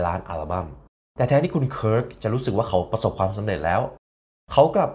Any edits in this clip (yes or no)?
yes